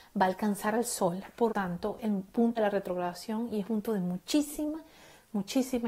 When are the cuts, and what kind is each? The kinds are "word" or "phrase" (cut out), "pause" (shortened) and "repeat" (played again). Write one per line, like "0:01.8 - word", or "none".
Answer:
0:01.5 - word
0:02.0 - word
0:02.6 - word
0:03.6 - word